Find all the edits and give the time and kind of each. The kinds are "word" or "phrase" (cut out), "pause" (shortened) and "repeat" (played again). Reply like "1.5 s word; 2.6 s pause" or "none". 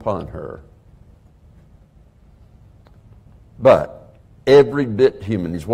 4.2 s pause